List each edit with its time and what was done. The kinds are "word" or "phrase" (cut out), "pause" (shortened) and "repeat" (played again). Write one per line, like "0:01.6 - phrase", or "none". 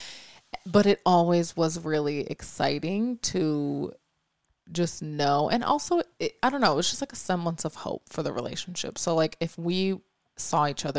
none